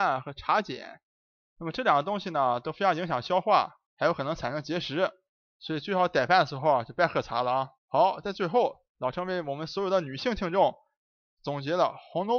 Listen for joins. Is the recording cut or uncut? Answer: cut